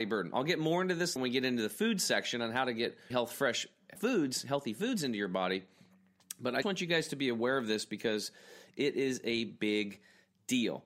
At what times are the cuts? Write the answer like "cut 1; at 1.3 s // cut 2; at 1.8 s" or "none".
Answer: cut 1; at 1.2 s // cut 2; at 3.1 s // cut 3; at 4.0 s // cut 4; at 6.6 s